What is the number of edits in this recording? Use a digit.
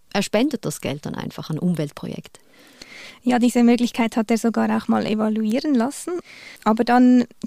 1